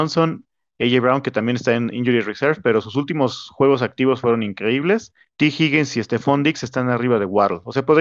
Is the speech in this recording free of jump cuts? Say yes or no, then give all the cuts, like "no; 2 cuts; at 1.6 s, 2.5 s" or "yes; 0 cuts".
no; 1 cut; at 5.3 s